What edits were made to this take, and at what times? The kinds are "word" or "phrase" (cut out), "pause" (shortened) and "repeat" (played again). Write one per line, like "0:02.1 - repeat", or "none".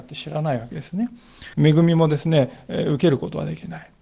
0:01.5 - pause